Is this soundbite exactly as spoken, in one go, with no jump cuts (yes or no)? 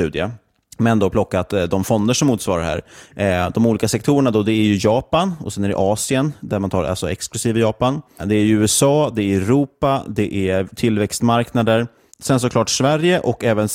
yes